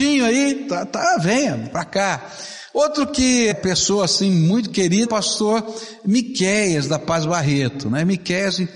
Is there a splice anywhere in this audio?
yes; 2 cuts; at 3.5 s, 5.1 s

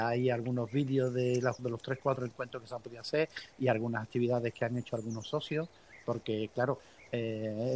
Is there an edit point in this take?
yes; 1 cut; at 1.6 s

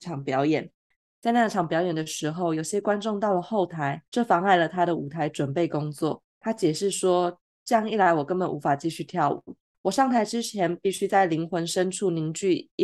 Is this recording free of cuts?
no; 3 cuts; at 4.1 s, 6.3 s, 9.7 s

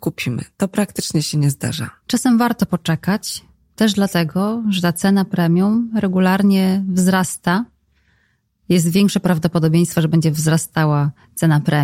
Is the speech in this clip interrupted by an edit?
no; 0 cuts

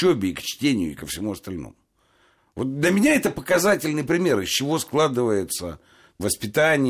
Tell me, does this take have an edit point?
no; 0 cuts

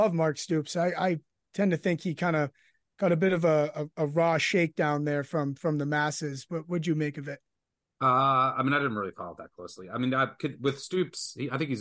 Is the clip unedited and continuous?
yes; 0 cuts

